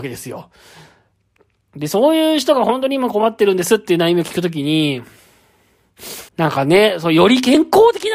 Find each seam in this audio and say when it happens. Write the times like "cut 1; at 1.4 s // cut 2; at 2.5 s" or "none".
cut 1; at 6.3 s